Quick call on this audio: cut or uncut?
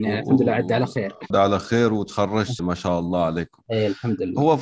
cut